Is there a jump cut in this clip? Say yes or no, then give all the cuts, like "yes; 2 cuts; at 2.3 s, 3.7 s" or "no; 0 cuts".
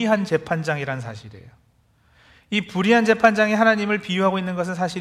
no; 0 cuts